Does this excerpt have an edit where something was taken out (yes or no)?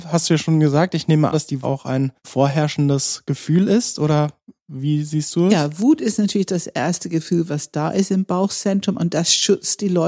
yes